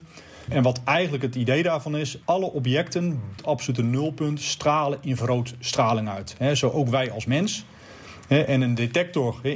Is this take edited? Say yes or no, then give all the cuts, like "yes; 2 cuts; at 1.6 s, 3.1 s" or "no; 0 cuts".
yes; 2 cuts; at 2.2 s, 3.4 s